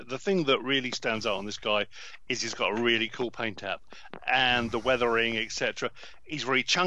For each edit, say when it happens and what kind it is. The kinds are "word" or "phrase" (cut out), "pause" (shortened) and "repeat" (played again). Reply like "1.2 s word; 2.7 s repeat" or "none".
none